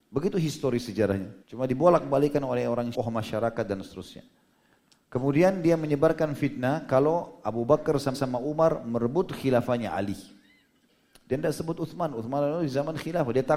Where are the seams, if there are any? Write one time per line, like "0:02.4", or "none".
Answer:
0:01.4
0:02.9
0:08.1